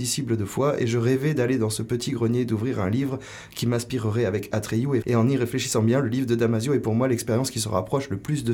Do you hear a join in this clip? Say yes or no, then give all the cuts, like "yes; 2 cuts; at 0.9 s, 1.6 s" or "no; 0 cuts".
yes; 1 cut; at 5.0 s